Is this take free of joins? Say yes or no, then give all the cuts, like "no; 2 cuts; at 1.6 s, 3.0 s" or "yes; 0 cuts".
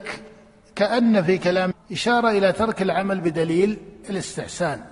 no; 1 cut; at 1.7 s